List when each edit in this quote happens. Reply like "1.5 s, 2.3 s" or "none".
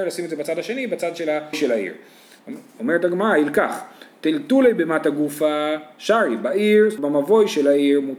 1.5 s, 7.0 s